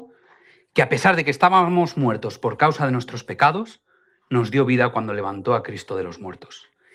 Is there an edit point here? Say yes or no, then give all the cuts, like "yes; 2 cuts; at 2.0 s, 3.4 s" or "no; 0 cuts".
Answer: no; 0 cuts